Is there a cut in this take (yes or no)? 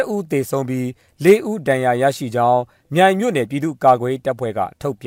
no